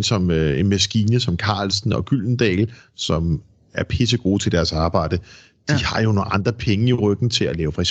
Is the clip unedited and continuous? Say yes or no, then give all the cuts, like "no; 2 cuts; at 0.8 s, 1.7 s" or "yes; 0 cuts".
yes; 0 cuts